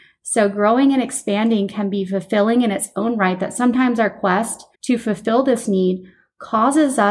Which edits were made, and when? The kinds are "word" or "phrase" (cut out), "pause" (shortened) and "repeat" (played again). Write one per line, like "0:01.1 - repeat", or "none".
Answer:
0:04.7 - pause